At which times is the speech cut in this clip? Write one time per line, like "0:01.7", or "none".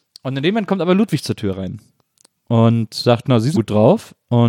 0:03.5